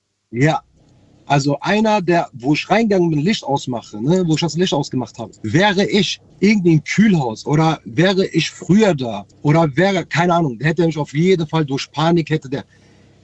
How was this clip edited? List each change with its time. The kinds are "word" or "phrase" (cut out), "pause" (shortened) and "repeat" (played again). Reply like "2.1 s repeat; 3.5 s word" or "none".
5.4 s pause; 6.3 s pause; 9.3 s pause